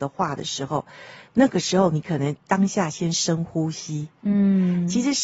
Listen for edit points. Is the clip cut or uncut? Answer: uncut